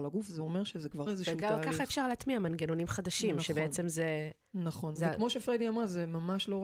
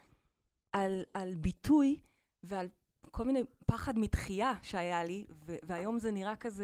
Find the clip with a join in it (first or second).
first